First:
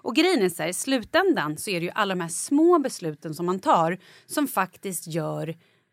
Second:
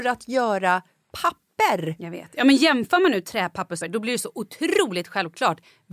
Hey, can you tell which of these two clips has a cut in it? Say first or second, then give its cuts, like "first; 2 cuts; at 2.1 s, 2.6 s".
second; 1 cut; at 3.8 s